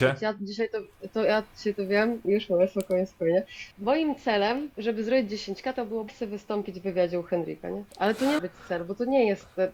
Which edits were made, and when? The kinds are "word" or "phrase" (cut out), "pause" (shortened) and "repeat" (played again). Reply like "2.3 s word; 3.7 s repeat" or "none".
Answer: 2.2 s word; 3.7 s pause; 4.7 s pause; 6.1 s word; 7.9 s pause; 8.4 s word